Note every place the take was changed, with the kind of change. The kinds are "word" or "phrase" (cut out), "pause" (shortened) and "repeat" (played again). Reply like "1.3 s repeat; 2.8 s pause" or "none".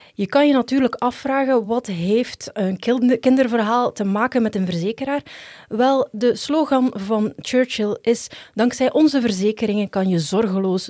none

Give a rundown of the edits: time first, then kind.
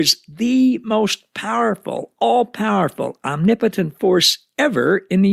none

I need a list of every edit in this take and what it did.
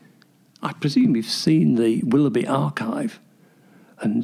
none

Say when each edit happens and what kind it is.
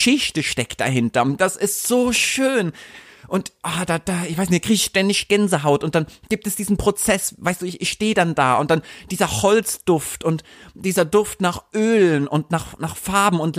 none

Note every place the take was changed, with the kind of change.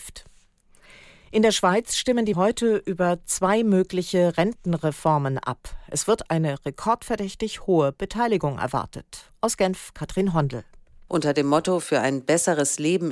2.3 s word

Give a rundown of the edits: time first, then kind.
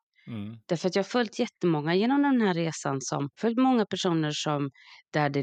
3.3 s pause

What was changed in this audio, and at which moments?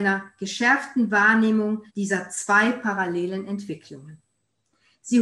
1.9 s pause

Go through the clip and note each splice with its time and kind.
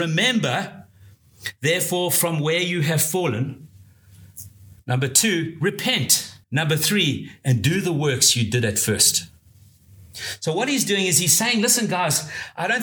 4.8 s pause; 6.4 s pause

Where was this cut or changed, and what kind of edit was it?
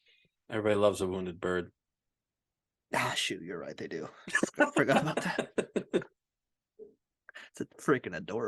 none

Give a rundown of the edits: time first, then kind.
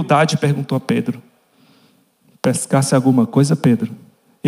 none

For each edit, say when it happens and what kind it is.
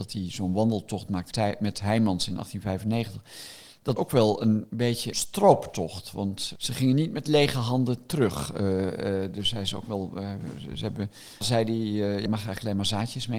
1.3 s word; 4.0 s word; 5.1 s word; 6.6 s word; 11.4 s word; 12.3 s word

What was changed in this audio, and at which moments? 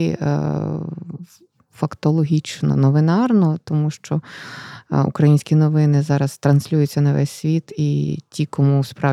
none

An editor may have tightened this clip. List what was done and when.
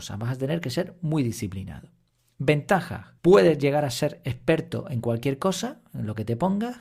3.2 s pause

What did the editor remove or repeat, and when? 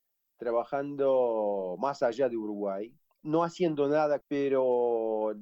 4.2 s phrase

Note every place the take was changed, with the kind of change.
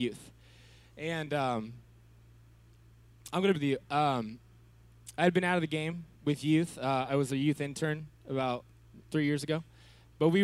3.6 s phrase; 6.1 s pause; 9.0 s word

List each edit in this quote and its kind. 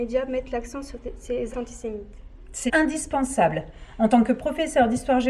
1.5 s word; 2.7 s word

